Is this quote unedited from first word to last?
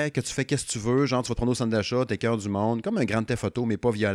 yes; 0 cuts

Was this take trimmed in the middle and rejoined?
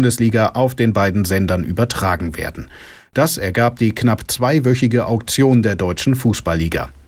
no; 0 cuts

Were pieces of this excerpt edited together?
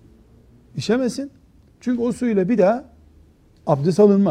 no; 0 cuts

